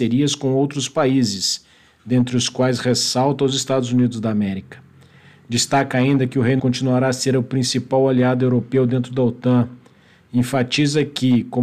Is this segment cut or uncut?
cut